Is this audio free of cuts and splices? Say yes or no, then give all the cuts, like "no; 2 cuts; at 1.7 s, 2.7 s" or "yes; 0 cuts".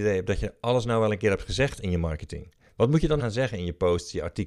no; 1 cut; at 3.2 s